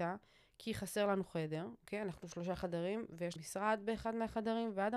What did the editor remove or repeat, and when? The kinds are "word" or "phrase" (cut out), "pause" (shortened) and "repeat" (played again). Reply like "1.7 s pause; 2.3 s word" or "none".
3.4 s word